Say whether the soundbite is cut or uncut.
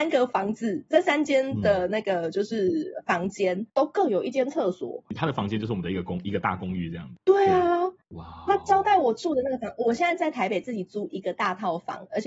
cut